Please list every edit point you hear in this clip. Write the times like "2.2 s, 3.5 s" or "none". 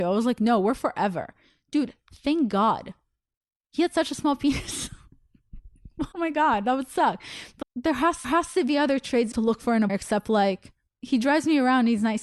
6.1 s, 7.6 s, 8.2 s, 9.3 s, 9.9 s, 10.9 s